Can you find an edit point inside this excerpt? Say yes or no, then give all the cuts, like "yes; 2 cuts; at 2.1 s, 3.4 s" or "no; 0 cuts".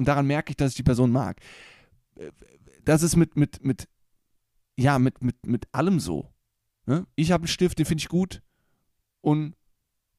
no; 0 cuts